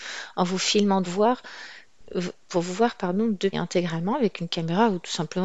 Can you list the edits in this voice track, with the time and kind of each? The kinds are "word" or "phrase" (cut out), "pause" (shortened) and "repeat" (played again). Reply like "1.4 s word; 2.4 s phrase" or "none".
1.0 s phrase; 3.5 s word